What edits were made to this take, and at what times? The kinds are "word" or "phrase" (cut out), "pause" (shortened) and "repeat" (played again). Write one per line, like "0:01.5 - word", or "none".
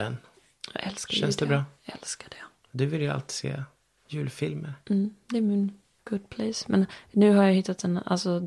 none